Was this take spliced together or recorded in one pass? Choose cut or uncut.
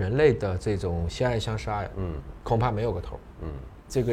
uncut